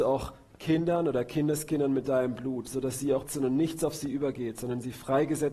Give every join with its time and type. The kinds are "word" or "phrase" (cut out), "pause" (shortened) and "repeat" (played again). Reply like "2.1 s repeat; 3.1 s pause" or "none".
3.3 s word